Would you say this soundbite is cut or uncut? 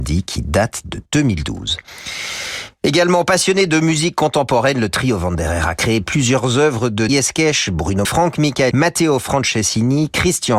cut